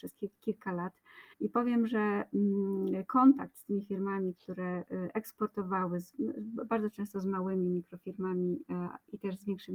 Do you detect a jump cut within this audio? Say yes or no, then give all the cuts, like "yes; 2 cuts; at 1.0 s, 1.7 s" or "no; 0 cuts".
yes; 1 cut; at 1.3 s